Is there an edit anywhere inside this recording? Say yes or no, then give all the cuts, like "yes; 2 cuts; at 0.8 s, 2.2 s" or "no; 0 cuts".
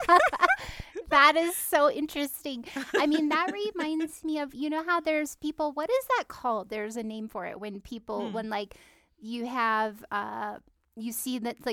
no; 0 cuts